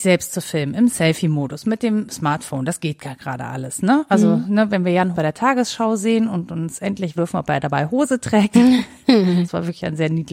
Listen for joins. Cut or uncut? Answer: cut